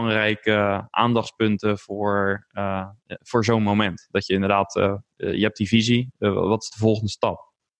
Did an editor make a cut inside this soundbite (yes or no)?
no